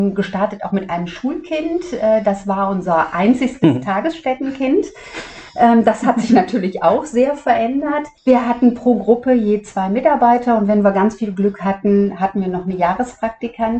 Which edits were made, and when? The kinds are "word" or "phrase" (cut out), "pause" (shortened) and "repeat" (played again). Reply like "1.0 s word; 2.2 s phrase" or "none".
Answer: 8.2 s pause